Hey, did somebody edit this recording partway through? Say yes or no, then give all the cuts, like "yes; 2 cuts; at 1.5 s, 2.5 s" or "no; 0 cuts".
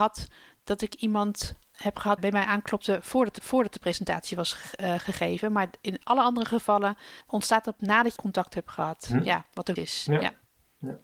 yes; 6 cuts; at 2.2 s, 3.4 s, 7.2 s, 7.8 s, 8.2 s, 9.8 s